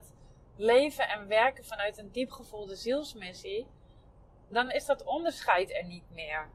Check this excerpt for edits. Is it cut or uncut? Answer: uncut